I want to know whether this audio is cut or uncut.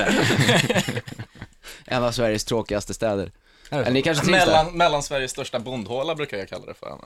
uncut